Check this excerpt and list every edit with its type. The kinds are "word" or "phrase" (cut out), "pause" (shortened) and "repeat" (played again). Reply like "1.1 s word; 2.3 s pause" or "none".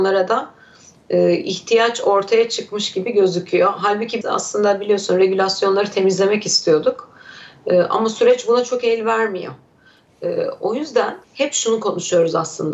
4.2 s word; 11.2 s pause